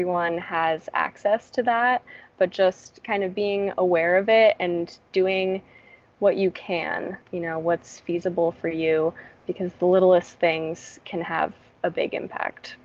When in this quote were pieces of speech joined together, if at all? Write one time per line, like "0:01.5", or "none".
0:07.2